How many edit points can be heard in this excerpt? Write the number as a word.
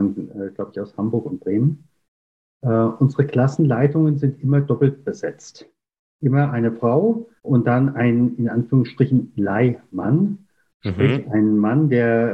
one